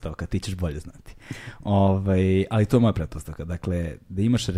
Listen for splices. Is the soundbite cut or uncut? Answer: uncut